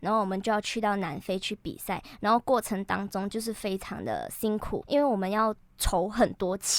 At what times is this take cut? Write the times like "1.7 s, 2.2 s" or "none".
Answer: 4.8 s